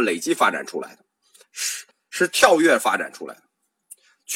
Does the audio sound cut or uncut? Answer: cut